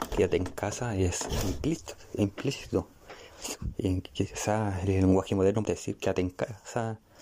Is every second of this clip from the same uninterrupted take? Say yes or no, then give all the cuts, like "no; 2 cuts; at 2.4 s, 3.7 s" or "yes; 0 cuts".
no; 1 cut; at 5.6 s